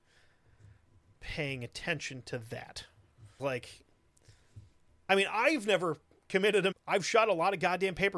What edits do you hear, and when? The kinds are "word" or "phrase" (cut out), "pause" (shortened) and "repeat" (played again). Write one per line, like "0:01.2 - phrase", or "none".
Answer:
0:03.4 - word
0:06.7 - phrase

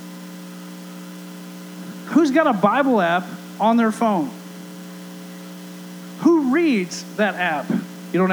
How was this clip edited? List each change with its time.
none

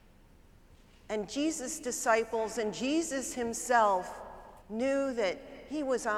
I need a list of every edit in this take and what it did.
0:04.6 - pause

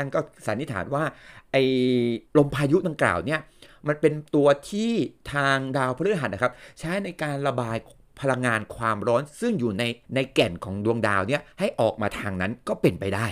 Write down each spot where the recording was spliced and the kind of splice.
0:02.3 - pause
0:10.0 - pause
0:11.5 - pause

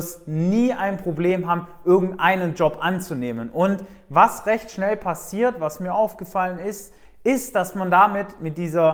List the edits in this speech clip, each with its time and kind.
none

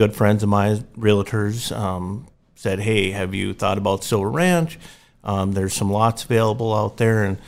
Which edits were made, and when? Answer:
none

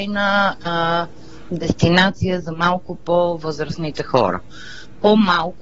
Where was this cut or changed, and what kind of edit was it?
0:01.5 - word

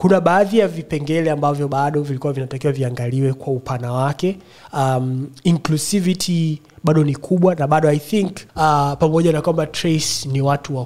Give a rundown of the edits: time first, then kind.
0:08.5 - pause

